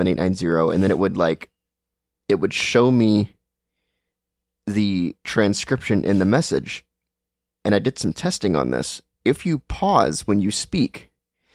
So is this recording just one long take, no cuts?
yes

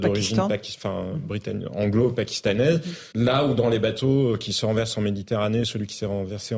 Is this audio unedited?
no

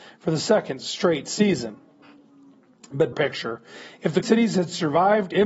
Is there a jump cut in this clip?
yes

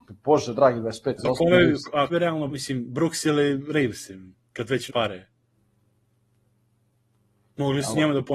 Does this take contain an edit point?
yes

